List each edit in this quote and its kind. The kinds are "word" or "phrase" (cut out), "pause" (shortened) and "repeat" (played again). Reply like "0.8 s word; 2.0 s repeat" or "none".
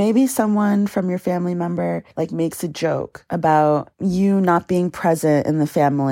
2.1 s pause